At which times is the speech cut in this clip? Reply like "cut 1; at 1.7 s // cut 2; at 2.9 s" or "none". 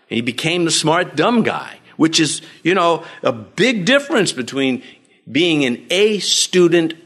none